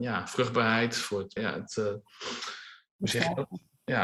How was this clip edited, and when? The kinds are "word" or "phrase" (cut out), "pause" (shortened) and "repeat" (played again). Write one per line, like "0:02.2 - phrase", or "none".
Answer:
0:01.4 - word